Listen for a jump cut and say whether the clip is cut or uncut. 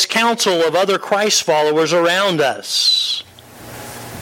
uncut